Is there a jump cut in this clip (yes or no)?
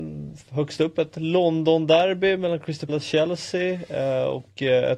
yes